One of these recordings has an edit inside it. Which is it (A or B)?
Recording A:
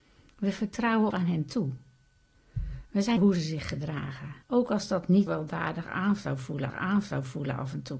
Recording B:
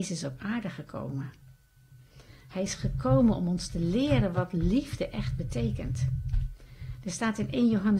A